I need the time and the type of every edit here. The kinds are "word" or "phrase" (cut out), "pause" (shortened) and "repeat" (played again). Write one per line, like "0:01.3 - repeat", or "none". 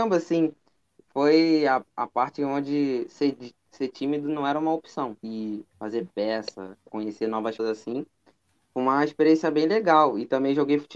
0:05.2 - pause
0:07.6 - word